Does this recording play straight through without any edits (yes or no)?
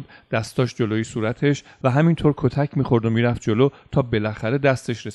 yes